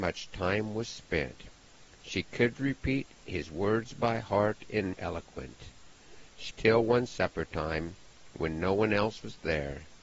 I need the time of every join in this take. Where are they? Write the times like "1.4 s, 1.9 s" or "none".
4.9 s, 6.5 s